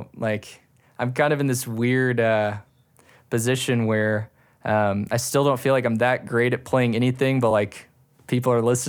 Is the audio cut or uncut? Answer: uncut